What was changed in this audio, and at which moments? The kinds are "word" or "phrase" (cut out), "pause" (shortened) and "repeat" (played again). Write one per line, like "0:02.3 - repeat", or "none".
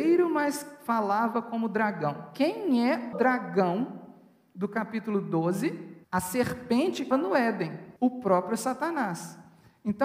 0:03.1 - word
0:06.0 - pause
0:07.1 - word
0:08.0 - pause